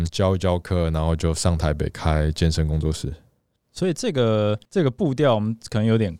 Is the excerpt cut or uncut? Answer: cut